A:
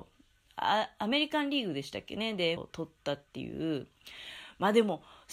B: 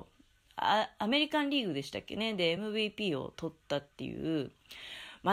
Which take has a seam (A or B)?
A